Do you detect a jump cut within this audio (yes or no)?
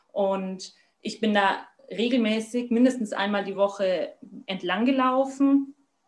no